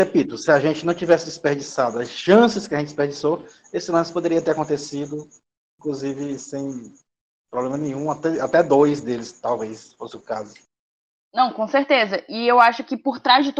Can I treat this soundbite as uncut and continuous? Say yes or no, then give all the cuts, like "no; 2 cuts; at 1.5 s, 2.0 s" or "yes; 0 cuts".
yes; 0 cuts